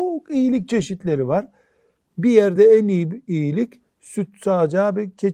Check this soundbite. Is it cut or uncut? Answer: uncut